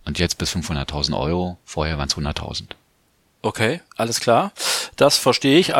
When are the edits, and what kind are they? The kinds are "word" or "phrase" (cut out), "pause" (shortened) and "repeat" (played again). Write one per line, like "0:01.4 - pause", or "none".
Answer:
none